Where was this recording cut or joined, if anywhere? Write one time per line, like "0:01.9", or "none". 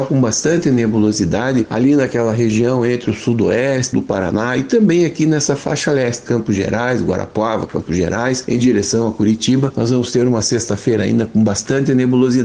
0:03.9
0:06.3